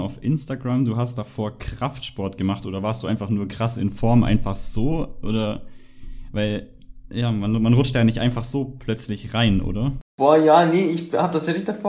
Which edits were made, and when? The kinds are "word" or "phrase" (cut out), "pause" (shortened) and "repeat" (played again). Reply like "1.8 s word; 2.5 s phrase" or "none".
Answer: 10.1 s pause